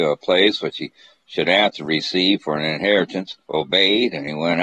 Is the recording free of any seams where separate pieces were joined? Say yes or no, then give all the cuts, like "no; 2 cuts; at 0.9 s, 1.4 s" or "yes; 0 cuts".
no; 1 cut; at 3.4 s